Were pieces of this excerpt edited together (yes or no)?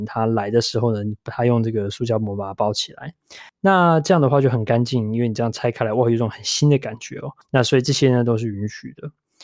yes